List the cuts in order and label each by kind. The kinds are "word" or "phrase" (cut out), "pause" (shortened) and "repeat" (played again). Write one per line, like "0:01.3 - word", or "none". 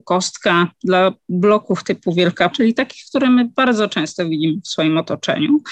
0:02.5 - word